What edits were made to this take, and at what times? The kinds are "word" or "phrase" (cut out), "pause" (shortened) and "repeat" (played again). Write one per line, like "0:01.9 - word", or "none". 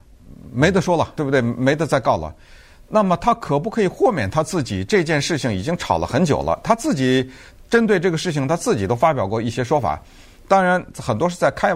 0:01.2 - word

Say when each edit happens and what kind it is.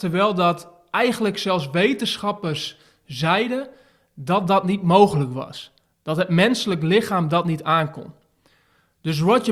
none

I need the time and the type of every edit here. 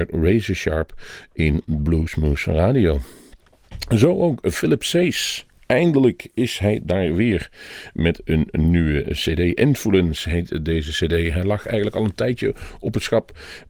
none

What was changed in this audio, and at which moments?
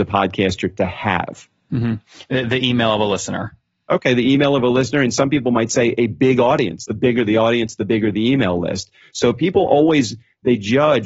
none

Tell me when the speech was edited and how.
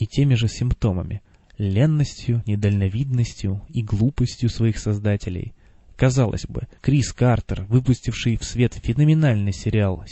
0:01.2 - pause
0:06.8 - pause

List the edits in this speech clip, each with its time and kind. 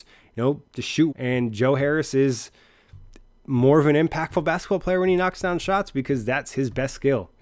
0:01.1 - word

